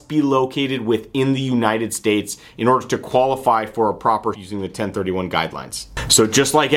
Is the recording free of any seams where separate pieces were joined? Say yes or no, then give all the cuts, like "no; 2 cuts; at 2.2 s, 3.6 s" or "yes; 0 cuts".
no; 1 cut; at 4.3 s